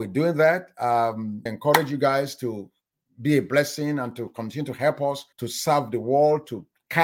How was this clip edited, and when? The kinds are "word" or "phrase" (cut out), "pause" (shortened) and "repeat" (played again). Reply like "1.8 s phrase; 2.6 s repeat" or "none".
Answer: 1.5 s phrase; 5.3 s pause

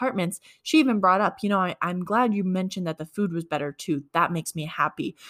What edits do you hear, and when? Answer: none

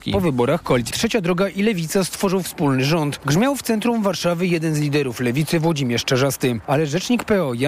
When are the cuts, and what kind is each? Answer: 0.9 s word

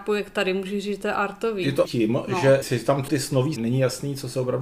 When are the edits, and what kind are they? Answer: 1.8 s word; 2.6 s word; 3.1 s word; 3.6 s word

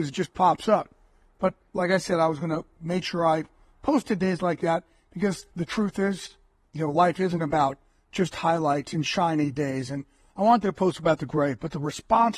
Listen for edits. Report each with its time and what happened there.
5.5 s pause

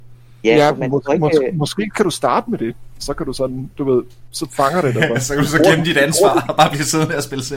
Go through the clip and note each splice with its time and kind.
none

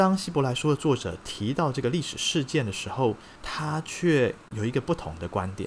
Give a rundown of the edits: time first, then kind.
3.4 s pause

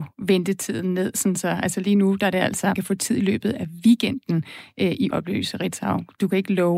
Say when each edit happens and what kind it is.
2.8 s word; 5.1 s word

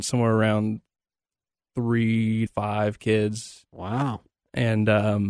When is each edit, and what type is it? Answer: 2.5 s word

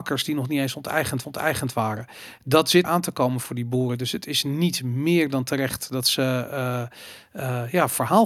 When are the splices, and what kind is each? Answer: 1.2 s repeat; 2.8 s word

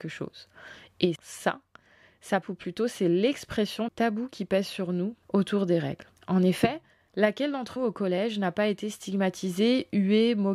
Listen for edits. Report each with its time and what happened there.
1.2 s word; 2.4 s word; 3.9 s word; 5.2 s pause; 6.2 s pause; 6.9 s pause; 7.8 s word

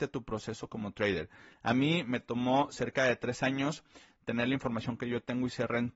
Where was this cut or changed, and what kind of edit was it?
none

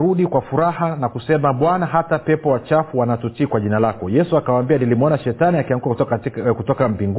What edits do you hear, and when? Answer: none

